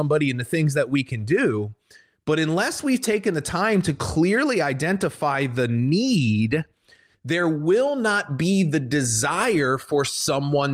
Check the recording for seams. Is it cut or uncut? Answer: uncut